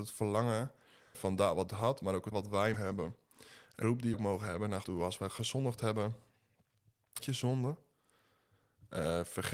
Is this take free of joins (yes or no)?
no